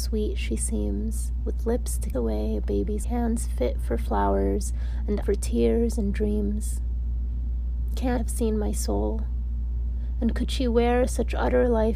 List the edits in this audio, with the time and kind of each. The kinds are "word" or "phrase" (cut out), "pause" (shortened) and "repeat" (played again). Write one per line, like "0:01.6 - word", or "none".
0:02.1 - word
0:03.0 - word
0:05.2 - word
0:08.2 - word

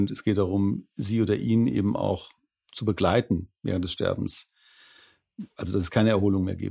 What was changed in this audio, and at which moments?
none

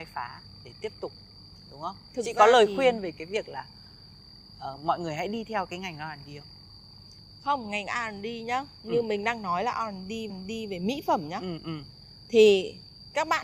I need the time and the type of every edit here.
0:04.8 - word
0:10.3 - repeat

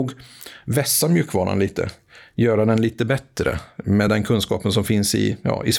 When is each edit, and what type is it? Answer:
none

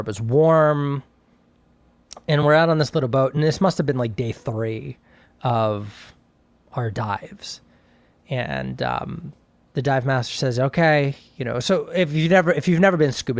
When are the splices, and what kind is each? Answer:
none

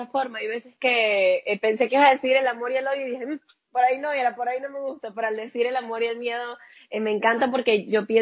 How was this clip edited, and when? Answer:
none

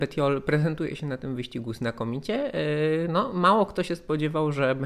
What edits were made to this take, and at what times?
none

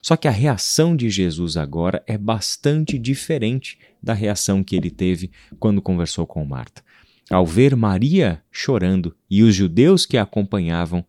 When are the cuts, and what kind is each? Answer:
none

